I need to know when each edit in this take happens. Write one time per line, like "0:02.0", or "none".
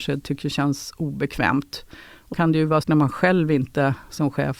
0:02.3
0:02.8